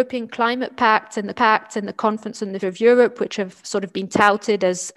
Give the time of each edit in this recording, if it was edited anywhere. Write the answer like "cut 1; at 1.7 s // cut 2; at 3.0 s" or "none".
cut 1; at 1.3 s // cut 2; at 2.6 s